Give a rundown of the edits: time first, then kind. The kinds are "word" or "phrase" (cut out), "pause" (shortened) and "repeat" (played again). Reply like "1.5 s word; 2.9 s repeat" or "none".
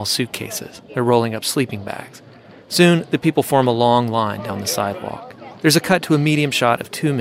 5.6 s pause

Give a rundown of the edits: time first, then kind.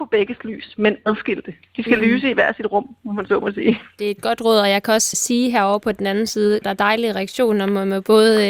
5.1 s word; 6.6 s word

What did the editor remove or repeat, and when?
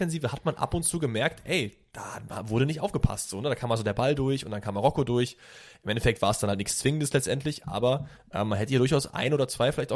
none

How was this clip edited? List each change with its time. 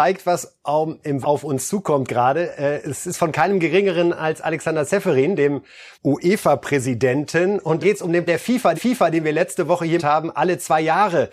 1.2 s word; 5.9 s pause; 7.8 s word; 8.3 s word; 8.7 s repeat; 10.0 s phrase

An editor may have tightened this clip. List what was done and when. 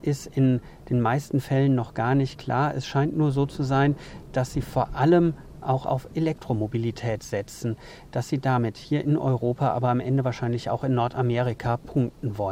none

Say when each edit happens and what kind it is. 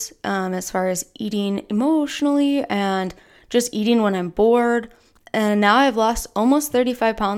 none

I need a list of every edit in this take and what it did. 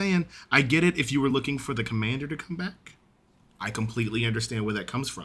none

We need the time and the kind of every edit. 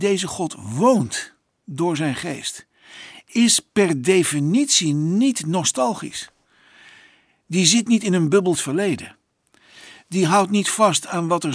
8.5 s phrase

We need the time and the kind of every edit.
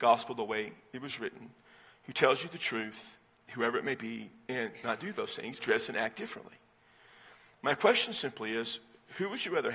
5.6 s word

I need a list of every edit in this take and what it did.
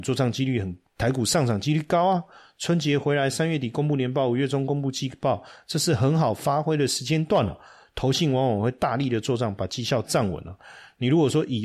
none

